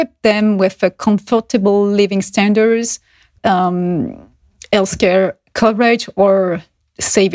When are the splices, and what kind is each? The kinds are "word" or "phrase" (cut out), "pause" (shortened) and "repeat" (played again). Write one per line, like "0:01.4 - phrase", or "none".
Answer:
0:03.4 - word